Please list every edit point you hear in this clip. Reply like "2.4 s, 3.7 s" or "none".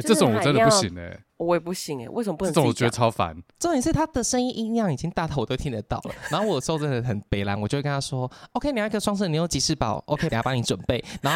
1.3 s, 3.5 s, 10.3 s